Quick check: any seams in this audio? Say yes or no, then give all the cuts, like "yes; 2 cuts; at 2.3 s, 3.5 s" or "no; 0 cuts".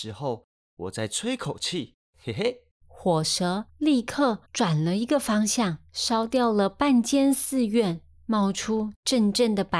yes; 6 cuts; at 2.1 s, 2.7 s, 3.7 s, 4.4 s, 5.9 s, 8.1 s